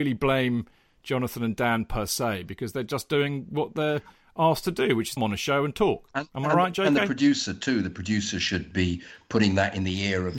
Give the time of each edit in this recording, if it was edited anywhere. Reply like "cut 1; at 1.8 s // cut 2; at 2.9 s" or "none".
cut 1; at 5.2 s